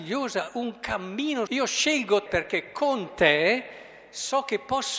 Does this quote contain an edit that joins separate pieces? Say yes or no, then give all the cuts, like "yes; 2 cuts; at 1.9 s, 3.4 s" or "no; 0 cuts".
yes; 2 cuts; at 1.5 s, 2.3 s